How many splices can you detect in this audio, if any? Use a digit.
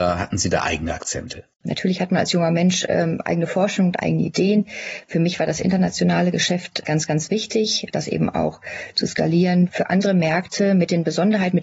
2